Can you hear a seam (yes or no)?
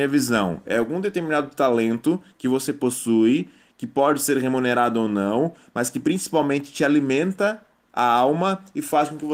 no